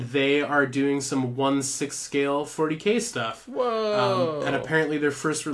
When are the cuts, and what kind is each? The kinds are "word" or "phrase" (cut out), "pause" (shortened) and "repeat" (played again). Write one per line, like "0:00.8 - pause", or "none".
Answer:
none